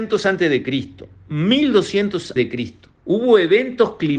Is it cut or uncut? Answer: cut